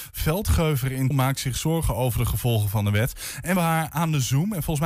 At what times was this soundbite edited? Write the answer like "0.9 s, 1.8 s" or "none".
1.1 s, 3.6 s